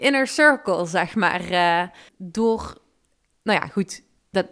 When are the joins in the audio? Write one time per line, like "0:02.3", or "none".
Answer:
0:02.1